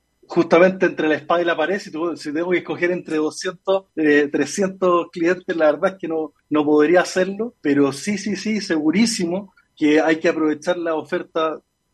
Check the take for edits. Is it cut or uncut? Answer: cut